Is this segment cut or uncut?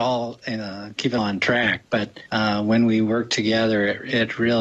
cut